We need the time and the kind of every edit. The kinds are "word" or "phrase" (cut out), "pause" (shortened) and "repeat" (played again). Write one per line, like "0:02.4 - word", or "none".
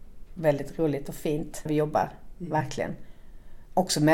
0:01.7 - word